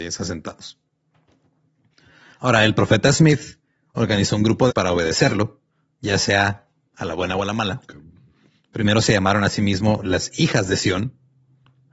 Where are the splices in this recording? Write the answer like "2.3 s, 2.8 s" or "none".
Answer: 4.7 s

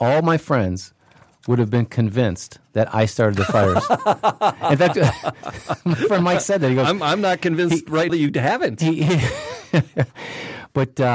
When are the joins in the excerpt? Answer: 8.1 s

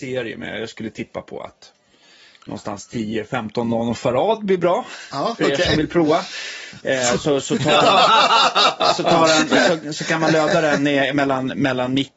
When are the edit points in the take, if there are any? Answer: none

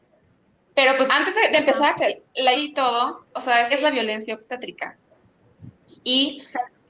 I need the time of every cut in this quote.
1.1 s, 2.0 s, 2.5 s, 3.3 s, 3.7 s

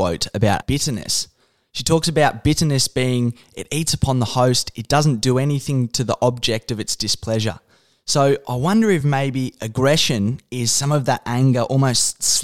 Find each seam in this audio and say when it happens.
none

